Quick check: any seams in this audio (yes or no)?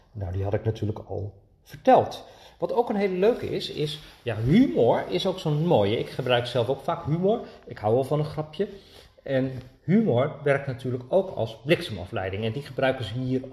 no